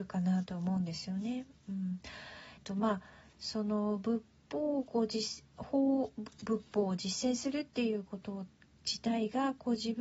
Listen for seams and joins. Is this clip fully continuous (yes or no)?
no